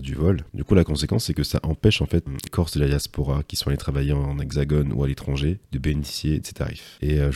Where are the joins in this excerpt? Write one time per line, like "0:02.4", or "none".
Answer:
0:02.5
0:06.4